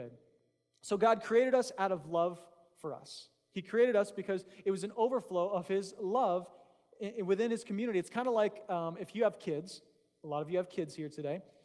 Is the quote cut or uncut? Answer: uncut